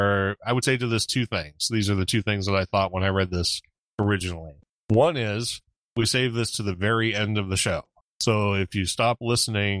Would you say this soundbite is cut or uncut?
uncut